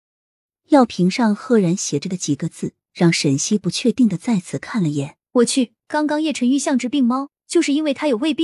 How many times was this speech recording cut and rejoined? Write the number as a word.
three